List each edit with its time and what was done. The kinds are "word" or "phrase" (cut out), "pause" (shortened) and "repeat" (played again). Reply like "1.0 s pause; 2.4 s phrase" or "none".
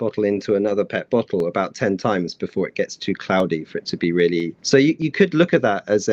4.6 s pause